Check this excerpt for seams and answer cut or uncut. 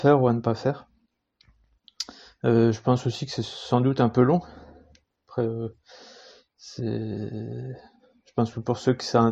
uncut